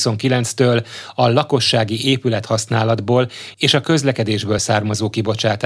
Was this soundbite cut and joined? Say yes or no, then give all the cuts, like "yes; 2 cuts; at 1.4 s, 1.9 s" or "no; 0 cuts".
no; 0 cuts